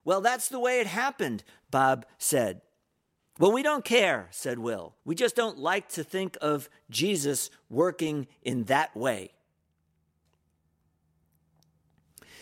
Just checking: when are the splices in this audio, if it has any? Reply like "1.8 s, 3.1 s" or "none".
5.0 s